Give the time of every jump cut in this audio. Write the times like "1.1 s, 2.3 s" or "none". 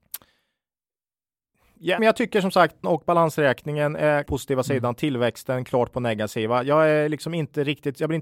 2.0 s, 2.8 s, 4.3 s